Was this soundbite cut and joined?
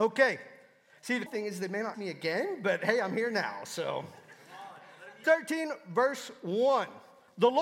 yes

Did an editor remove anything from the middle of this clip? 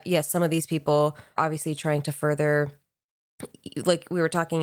yes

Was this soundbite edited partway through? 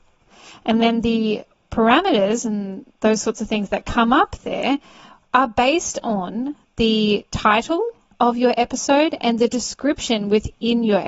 no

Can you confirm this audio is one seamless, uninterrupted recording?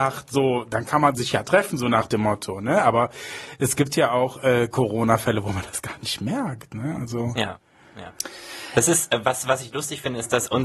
yes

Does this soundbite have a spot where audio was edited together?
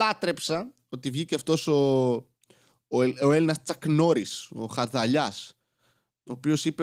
no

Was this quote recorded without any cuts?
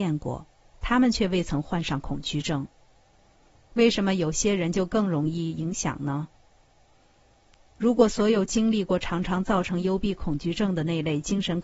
yes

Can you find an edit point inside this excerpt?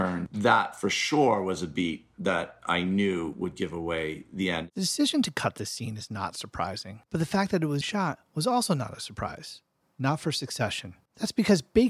yes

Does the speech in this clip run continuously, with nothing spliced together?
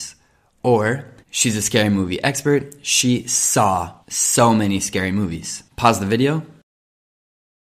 no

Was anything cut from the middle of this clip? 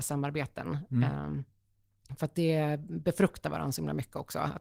no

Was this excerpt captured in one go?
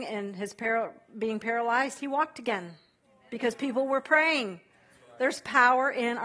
yes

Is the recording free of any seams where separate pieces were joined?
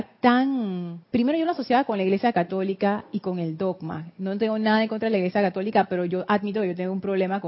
no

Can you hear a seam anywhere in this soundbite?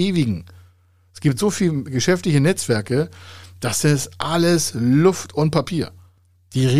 no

